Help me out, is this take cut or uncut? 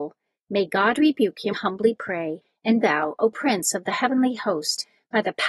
cut